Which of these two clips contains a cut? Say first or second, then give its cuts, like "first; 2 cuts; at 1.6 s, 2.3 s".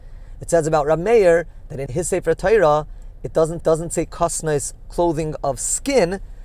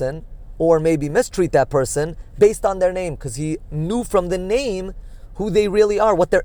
first; 3 cuts; at 1.9 s, 3.6 s, 4.9 s